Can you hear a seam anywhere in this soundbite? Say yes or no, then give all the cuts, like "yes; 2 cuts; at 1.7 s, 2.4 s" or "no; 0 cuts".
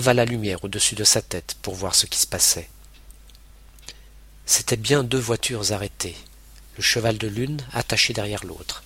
no; 0 cuts